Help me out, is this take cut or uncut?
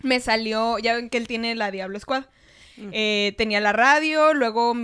uncut